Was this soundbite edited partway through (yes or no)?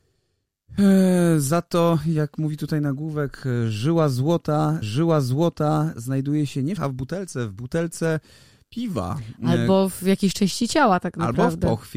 yes